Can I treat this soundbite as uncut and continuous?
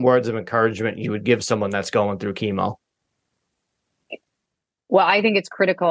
yes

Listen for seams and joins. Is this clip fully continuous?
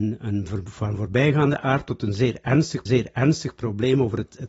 no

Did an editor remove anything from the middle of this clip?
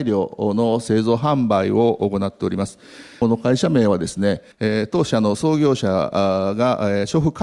yes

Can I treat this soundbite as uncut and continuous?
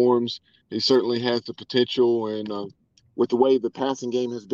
yes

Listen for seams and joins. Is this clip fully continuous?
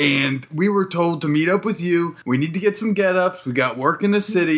no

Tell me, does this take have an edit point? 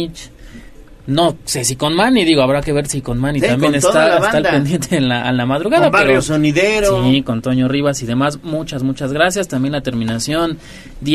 no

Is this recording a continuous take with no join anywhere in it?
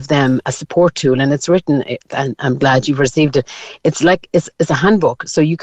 no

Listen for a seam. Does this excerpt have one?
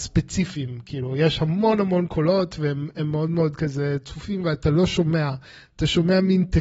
no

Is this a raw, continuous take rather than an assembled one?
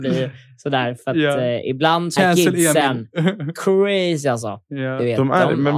no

